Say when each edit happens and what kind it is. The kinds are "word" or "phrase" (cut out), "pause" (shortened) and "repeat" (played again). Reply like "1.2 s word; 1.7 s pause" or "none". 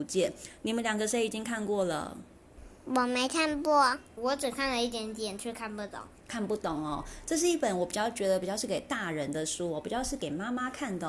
4.2 s word